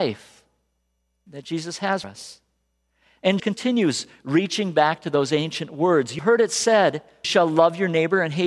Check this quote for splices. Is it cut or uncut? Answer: cut